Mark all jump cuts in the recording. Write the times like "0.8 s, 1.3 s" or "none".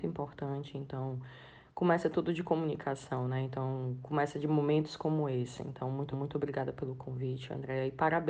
6.1 s